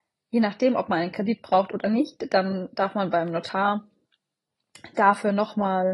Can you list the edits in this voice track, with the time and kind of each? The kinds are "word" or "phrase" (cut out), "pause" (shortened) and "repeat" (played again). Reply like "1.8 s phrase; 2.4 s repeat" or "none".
none

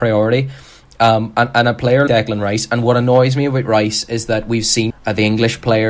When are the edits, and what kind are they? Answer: 2.1 s word; 4.9 s word

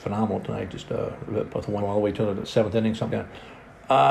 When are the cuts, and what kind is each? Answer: 1.5 s word; 1.8 s word; 2.4 s word; 3.1 s word

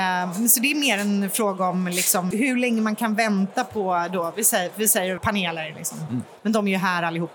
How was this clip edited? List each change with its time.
2.3 s word; 5.2 s phrase

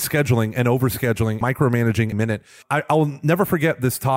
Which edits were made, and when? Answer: 1.4 s word; 2.1 s word; 2.6 s word

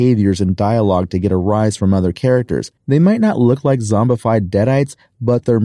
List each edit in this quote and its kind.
2.8 s pause

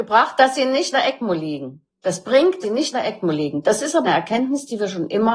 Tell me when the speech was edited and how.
0.9 s word; 2.6 s word; 2.9 s word; 4.0 s word

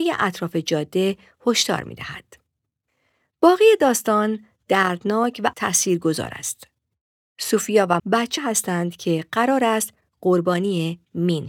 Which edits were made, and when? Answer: 5.5 s word; 8.0 s word; 8.4 s word

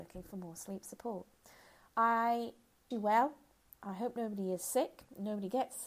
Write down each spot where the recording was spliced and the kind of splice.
2.9 s word

